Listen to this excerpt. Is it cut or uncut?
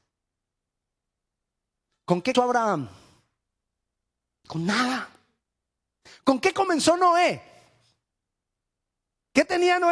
cut